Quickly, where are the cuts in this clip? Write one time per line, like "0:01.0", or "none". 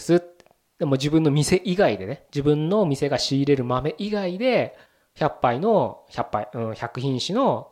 0:02.3
0:04.9